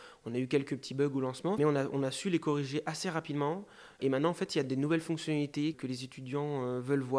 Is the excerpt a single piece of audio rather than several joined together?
no; 2 cuts; at 1.6 s, 5.7 s

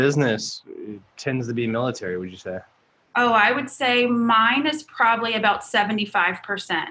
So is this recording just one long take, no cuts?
yes; 0 cuts

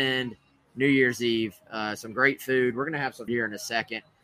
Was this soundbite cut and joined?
yes; 1 cut; at 3.3 s

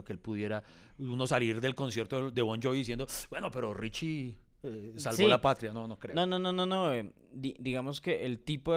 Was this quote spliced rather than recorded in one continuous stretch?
no; 0 cuts

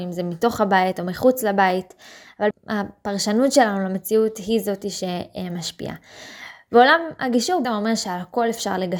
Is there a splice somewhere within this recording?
yes; 2 cuts; at 2.5 s, 7.6 s

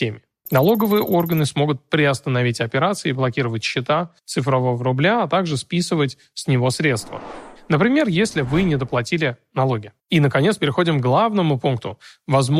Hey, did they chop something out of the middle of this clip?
yes; 2 cuts; at 4.2 s, 10.0 s

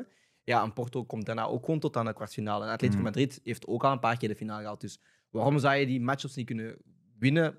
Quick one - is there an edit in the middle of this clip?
no; 0 cuts

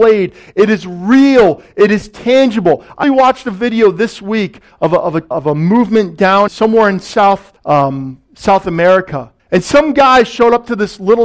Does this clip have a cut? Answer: yes; 5 cuts; at 3.0 s, 5.3 s, 6.5 s, 7.6 s, 9.4 s

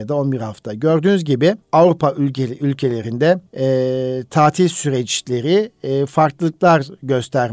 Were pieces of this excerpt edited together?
yes; 2 cuts; at 1.6 s, 3.5 s

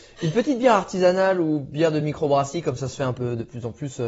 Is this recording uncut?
yes; 0 cuts

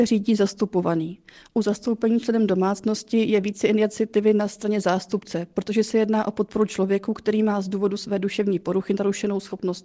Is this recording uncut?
yes; 0 cuts

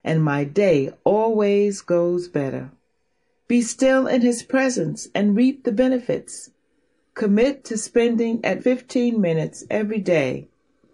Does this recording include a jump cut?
yes; 1 cut; at 8.6 s

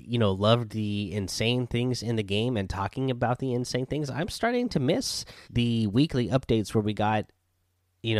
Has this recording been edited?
yes; 1 cut; at 5.4 s

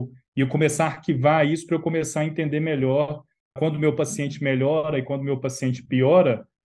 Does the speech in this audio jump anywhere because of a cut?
yes; 1 cut; at 3.6 s

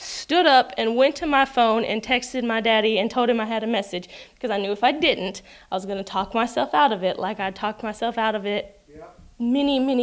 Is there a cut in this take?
no; 0 cuts

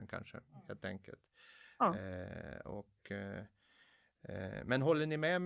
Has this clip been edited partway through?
no; 0 cuts

